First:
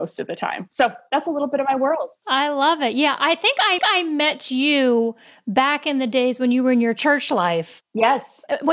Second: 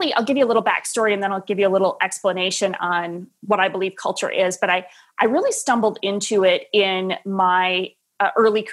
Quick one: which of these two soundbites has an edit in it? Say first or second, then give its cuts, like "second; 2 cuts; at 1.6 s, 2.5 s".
first; 1 cut; at 3.8 s